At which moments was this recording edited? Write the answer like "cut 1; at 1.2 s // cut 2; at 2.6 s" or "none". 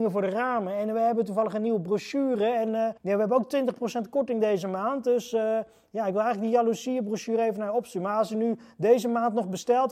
cut 1; at 3.0 s